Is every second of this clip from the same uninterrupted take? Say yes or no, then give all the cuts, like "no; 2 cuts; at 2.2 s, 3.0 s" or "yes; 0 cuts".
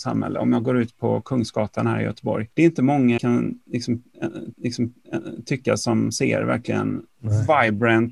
no; 4 cuts; at 2.5 s, 3.2 s, 4.5 s, 7.1 s